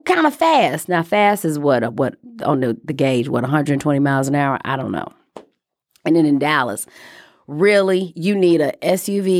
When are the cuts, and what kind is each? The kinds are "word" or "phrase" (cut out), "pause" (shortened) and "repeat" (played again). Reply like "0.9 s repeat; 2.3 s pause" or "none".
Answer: none